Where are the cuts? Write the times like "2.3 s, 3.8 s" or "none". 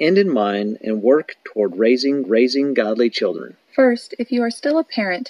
2.2 s, 3.6 s